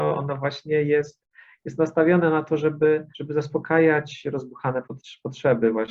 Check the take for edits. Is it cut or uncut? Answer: cut